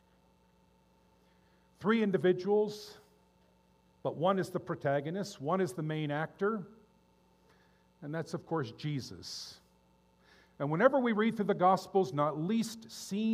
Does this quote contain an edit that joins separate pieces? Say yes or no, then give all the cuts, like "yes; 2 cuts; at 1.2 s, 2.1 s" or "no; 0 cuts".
no; 0 cuts